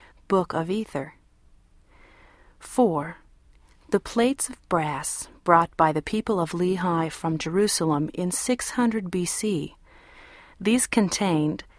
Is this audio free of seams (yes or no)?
yes